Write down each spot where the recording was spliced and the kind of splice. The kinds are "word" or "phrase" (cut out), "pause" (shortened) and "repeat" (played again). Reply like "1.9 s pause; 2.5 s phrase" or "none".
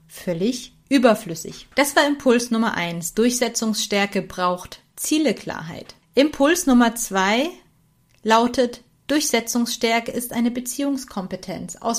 1.7 s pause; 6.0 s pause; 7.7 s pause